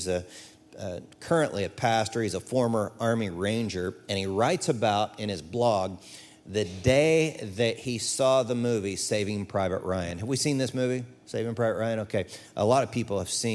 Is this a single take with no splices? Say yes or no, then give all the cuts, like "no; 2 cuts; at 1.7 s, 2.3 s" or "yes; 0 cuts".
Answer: yes; 0 cuts